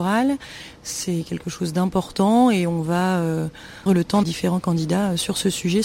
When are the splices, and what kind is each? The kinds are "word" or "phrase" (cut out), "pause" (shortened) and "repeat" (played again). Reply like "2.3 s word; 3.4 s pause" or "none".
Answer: 3.9 s word; 4.2 s phrase